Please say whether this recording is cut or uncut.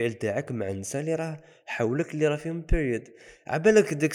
uncut